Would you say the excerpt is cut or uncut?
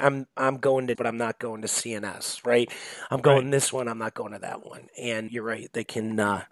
cut